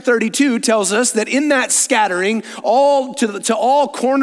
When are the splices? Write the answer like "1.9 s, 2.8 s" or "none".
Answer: none